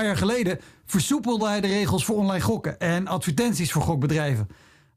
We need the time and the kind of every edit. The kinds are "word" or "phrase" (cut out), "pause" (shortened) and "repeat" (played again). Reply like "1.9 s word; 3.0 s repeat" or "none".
none